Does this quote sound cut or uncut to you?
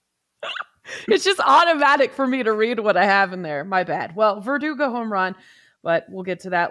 uncut